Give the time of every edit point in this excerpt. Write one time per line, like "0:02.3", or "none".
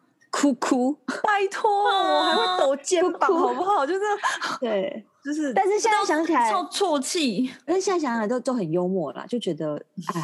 0:07.7

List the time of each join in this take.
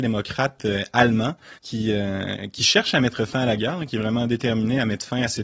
0:01.6

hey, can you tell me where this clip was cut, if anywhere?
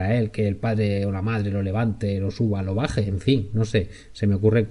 none

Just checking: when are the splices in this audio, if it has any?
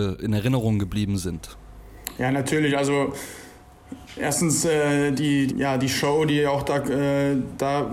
0:05.5

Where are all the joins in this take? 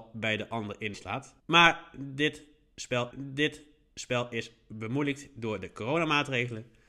0:00.9
0:01.4
0:03.1

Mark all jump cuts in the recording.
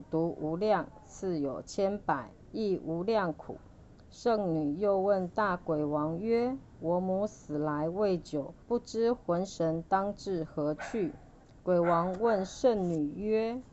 0:02.4
0:08.6

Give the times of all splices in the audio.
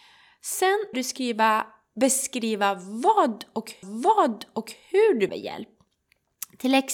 0:00.9
0:03.8
0:05.3

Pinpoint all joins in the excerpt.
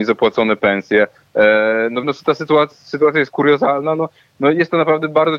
0:02.0
0:02.7

